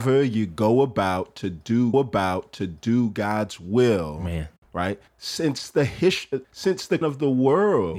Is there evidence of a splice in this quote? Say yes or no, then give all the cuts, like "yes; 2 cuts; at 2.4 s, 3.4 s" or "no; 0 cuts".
yes; 4 cuts; at 1.9 s, 5.1 s, 6.4 s, 7.0 s